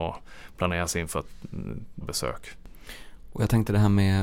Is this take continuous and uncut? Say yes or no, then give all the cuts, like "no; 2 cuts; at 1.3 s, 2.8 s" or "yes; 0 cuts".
no; 1 cut; at 2.0 s